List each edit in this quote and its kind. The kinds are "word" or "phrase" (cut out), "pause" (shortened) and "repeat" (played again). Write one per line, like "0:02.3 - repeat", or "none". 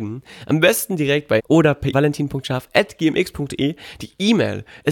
0:01.4 - word
0:01.9 - phrase